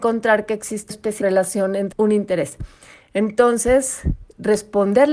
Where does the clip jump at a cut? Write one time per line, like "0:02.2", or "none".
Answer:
0:00.9
0:01.2
0:01.9